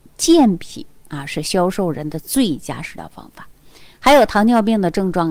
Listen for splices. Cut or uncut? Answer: uncut